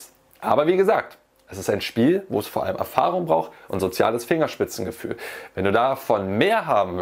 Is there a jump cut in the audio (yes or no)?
no